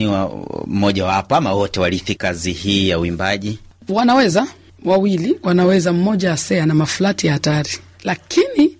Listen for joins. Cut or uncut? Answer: uncut